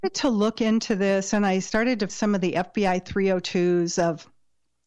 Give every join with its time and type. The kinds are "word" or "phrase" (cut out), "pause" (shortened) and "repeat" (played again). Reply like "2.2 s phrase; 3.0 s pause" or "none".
2.1 s word